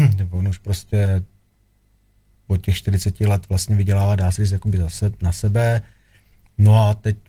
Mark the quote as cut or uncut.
uncut